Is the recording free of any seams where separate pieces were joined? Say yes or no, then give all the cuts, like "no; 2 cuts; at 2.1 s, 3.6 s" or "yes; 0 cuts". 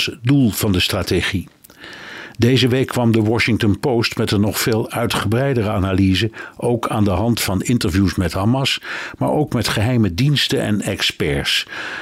yes; 0 cuts